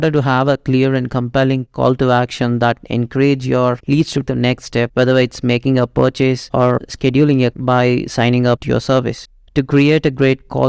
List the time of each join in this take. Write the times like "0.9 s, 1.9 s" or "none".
4.3 s, 7.5 s

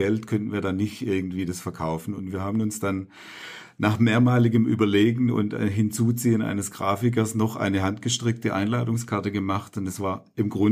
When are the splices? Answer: none

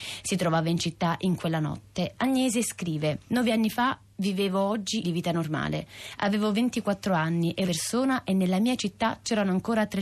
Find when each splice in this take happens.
3.2 s, 5.0 s, 7.7 s

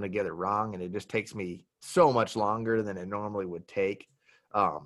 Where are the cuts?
1.7 s

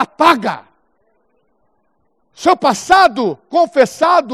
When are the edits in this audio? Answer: none

